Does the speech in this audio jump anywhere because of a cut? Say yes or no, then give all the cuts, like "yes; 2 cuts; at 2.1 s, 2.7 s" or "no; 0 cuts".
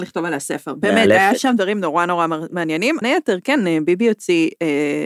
yes; 1 cut; at 3.0 s